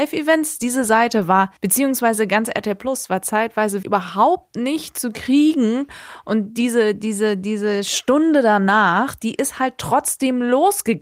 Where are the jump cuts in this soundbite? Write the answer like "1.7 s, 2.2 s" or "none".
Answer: 1.6 s, 3.8 s